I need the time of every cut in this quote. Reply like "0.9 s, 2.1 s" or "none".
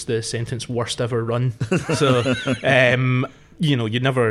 none